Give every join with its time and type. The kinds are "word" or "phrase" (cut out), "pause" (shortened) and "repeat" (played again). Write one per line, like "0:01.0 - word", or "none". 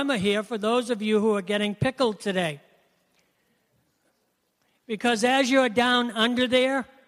none